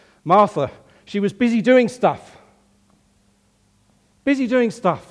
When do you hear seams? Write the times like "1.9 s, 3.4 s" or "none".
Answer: none